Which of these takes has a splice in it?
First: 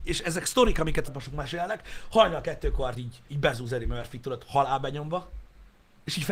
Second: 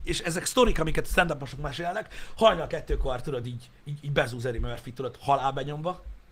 first; 3 cuts; at 1.1 s, 2.9 s, 3.3 s

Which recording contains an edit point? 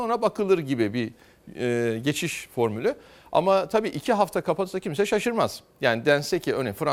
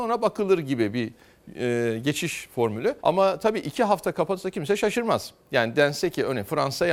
second; 1 cut; at 3.0 s

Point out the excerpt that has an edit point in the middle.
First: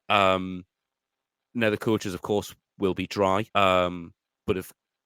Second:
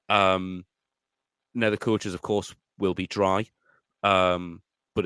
first; 1 cut; at 3.5 s

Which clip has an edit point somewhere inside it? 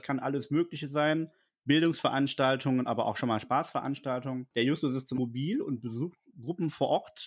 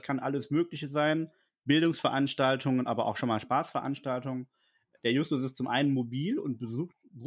first; 2 cuts; at 4.5 s, 5.2 s

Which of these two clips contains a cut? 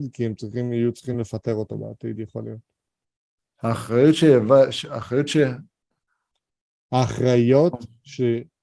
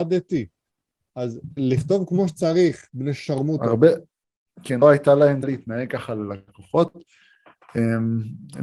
second; 4 cuts; at 1.6 s, 2.9 s, 4.8 s, 5.4 s

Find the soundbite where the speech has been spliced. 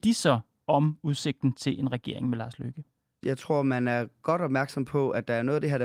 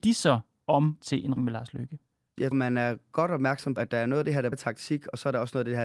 second; 5 cuts; at 1.0 s, 1.4 s, 2.5 s, 3.8 s, 4.5 s

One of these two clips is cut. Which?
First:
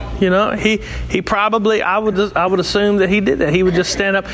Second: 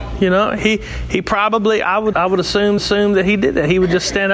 second; 2 cuts; at 2.1 s, 2.8 s

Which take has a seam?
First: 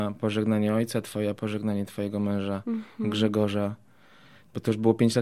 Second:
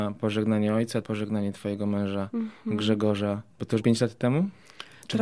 second; 3 cuts; at 1.0 s, 3.5 s, 3.8 s

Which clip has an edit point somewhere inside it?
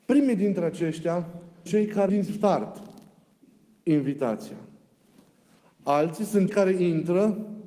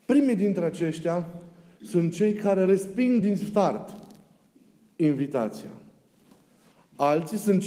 first; 3 cuts; at 1.7 s, 2.1 s, 6.5 s

